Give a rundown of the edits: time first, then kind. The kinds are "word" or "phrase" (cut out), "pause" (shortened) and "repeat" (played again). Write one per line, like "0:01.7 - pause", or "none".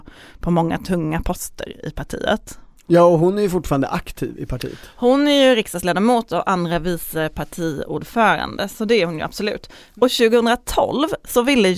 none